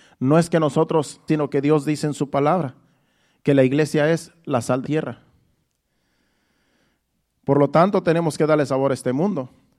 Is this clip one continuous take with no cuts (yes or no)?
no